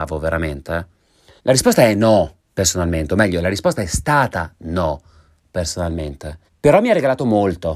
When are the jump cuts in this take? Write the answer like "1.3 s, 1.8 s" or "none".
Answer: 1.4 s, 2.4 s, 6.5 s